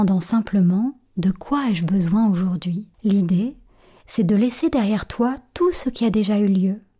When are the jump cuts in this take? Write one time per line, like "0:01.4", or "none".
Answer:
0:02.9